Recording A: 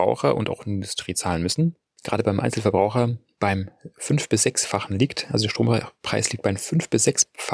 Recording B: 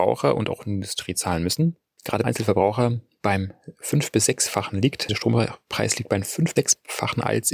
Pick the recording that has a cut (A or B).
B